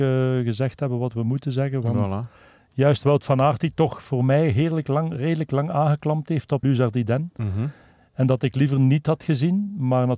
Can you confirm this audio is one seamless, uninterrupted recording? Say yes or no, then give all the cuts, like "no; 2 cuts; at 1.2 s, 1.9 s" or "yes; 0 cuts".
no; 1 cut; at 6.6 s